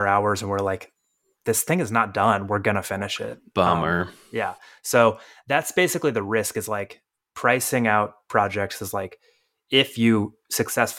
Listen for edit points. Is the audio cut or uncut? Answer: uncut